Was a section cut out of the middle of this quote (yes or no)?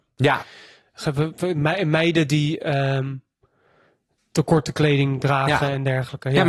no